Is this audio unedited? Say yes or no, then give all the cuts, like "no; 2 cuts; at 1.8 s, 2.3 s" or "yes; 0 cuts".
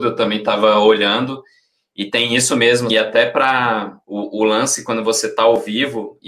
no; 2 cuts; at 2.9 s, 4.0 s